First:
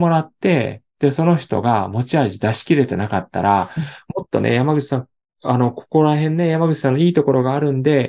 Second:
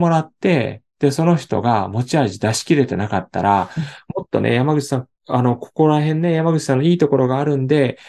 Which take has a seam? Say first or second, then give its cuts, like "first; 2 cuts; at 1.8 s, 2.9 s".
second; 1 cut; at 5.2 s